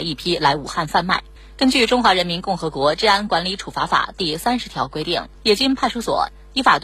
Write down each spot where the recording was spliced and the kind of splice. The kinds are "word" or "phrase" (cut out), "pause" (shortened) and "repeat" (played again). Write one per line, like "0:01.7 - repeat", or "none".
0:01.4 - pause
0:05.3 - pause